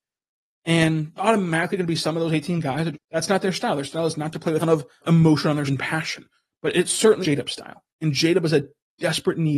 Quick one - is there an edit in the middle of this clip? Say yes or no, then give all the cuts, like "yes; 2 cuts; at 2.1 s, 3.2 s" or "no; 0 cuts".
yes; 6 cuts; at 1.2 s, 2.9 s, 4.6 s, 5.0 s, 5.7 s, 7.2 s